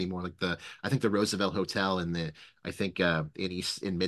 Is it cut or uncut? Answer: uncut